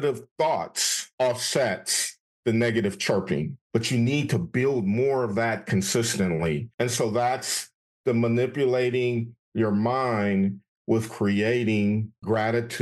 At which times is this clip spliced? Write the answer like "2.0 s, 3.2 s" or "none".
3.6 s